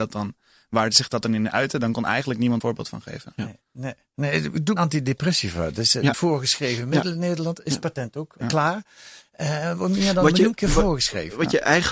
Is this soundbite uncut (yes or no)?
no